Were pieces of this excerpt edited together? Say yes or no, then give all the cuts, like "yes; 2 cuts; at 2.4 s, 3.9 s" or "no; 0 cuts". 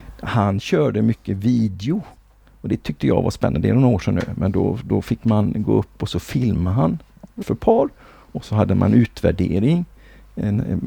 yes; 1 cut; at 7.4 s